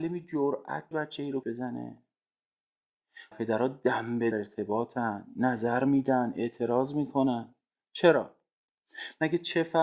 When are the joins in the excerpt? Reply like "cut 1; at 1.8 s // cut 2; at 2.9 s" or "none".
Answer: cut 1; at 0.9 s // cut 2; at 1.4 s // cut 3; at 3.3 s // cut 4; at 4.3 s // cut 5; at 7.7 s